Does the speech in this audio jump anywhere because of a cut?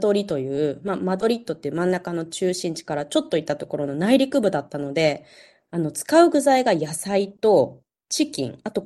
no; 0 cuts

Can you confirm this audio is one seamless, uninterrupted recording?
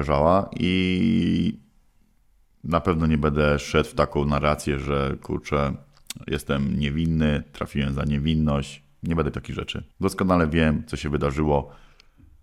no; 2 cuts; at 9.3 s, 9.9 s

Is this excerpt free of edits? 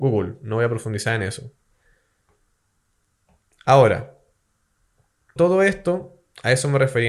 no; 1 cut; at 5.4 s

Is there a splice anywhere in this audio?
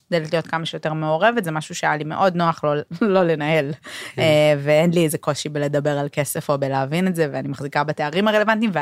no; 0 cuts

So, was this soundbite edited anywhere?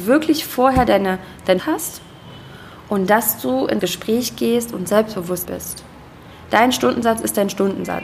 yes; 3 cuts; at 1.6 s, 3.8 s, 5.5 s

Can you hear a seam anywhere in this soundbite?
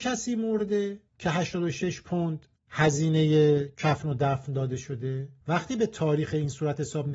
yes; 3 cuts; at 1.1 s, 2.5 s, 5.4 s

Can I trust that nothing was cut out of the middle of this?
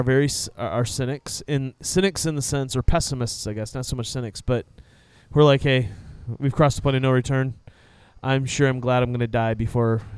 yes; 0 cuts

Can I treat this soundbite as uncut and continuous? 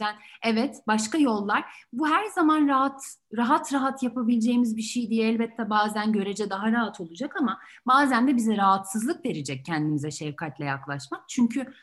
yes; 0 cuts

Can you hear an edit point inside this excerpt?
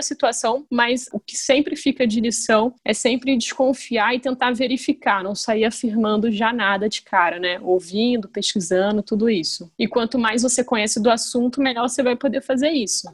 no; 0 cuts

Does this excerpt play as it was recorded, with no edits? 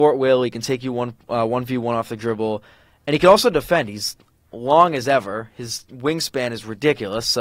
yes; 0 cuts

